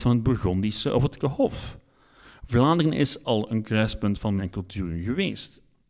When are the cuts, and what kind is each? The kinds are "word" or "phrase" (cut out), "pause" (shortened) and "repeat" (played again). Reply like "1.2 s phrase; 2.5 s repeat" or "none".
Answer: 1.2 s word; 3.2 s word; 4.4 s word